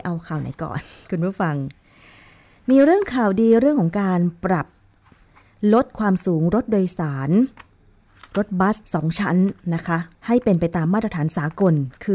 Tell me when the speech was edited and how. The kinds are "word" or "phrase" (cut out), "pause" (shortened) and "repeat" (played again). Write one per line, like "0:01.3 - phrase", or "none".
0:08.8 - pause
0:10.1 - pause